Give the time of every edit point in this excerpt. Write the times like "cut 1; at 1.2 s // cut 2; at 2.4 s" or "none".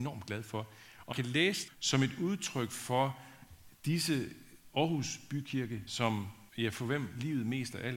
cut 1; at 1.1 s // cut 2; at 1.7 s // cut 3; at 3.7 s // cut 4; at 5.9 s // cut 5; at 6.5 s

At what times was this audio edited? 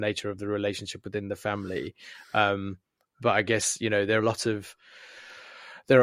cut 1; at 4.2 s

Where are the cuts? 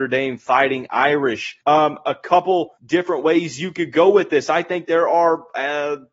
cut 1; at 1.6 s // cut 2; at 2.8 s

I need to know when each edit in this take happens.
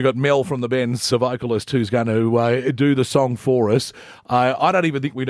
cut 1; at 1.1 s

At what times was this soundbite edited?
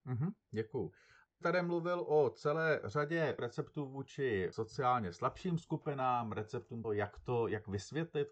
cut 1; at 1.4 s // cut 2; at 3.4 s // cut 3; at 6.8 s

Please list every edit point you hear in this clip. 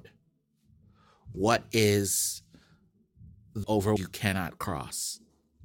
cut 1; at 3.6 s // cut 2; at 4.0 s

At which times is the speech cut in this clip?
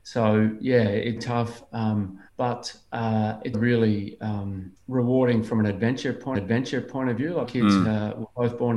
cut 1; at 1.2 s // cut 2; at 2.3 s // cut 3; at 3.5 s // cut 4; at 4.8 s // cut 5; at 6.3 s // cut 6; at 7.4 s

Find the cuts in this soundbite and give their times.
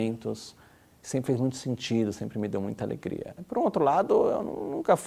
none

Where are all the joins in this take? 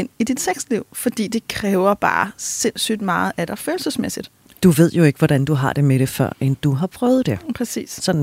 none

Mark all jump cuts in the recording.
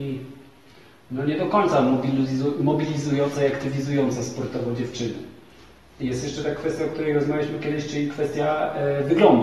none

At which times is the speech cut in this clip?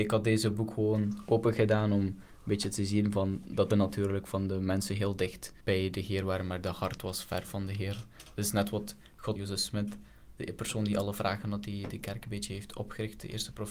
cut 1; at 3.7 s // cut 2; at 5.6 s // cut 3; at 9.4 s // cut 4; at 10.3 s

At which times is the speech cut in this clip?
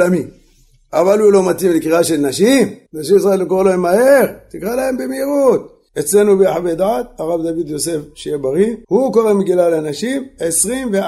cut 1; at 2.9 s // cut 2; at 5.9 s // cut 3; at 8.8 s

